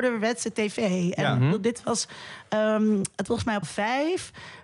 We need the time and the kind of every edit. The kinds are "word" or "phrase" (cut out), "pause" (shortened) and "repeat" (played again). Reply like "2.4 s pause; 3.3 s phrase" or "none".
3.3 s word; 3.6 s word